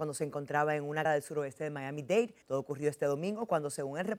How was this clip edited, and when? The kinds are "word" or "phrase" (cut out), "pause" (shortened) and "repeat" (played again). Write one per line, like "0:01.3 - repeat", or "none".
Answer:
0:01.0 - word
0:02.4 - pause